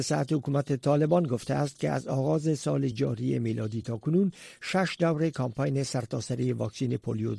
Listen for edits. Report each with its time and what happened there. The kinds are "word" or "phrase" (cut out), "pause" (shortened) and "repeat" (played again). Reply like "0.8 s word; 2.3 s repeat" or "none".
none